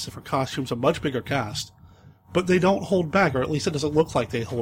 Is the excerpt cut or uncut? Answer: uncut